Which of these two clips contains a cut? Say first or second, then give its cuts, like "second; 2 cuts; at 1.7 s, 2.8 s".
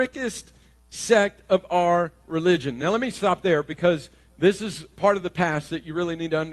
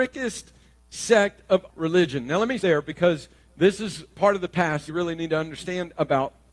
second; 3 cuts; at 1.7 s, 2.6 s, 4.9 s